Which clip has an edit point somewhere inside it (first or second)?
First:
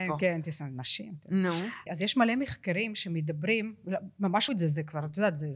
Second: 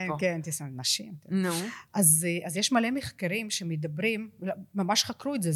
first